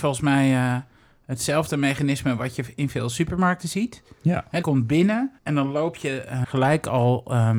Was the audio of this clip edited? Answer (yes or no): yes